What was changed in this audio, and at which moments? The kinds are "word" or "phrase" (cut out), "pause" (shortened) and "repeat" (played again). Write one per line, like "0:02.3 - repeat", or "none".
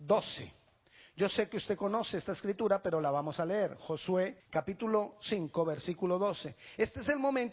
0:04.4 - pause

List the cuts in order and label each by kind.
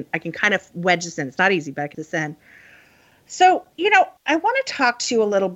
0:01.9 - word
0:03.7 - pause
0:04.2 - pause

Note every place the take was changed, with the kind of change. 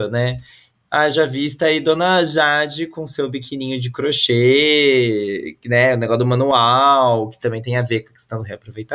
none

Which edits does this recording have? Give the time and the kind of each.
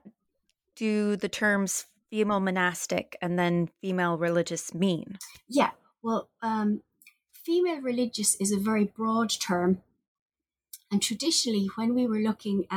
none

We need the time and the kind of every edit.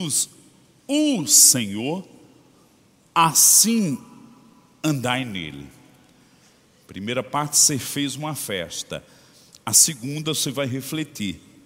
none

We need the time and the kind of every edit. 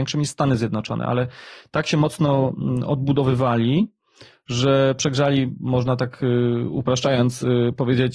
none

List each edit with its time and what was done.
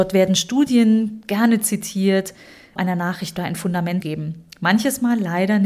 0:02.8 - word
0:03.4 - phrase
0:04.0 - word

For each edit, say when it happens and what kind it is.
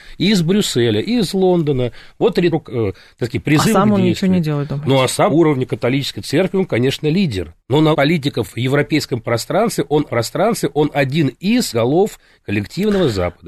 0:02.5 - phrase
0:05.3 - word
0:07.6 - pause
0:07.9 - word
0:10.1 - repeat
0:11.7 - word

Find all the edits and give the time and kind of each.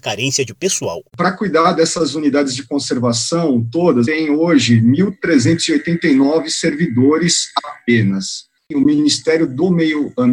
0:01.1 - pause
0:04.0 - phrase

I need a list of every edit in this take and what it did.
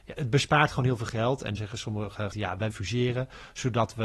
0:01.6 - word
0:02.3 - word
0:02.7 - word

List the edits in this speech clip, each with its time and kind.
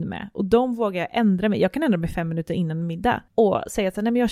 0:03.3 - pause

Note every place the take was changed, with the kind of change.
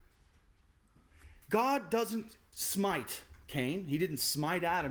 0:01.4 - pause

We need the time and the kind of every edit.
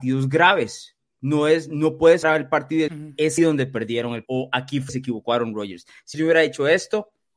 0:02.2 - word
0:02.9 - word
0:03.4 - word
0:04.3 - word
0:04.9 - word
0:06.1 - word

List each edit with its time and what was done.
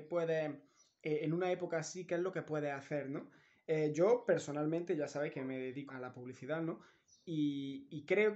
0:05.9 - word

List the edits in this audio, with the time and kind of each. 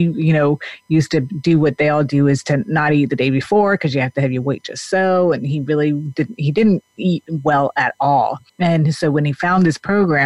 0:08.5 - pause

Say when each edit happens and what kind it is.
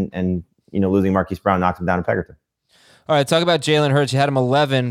none

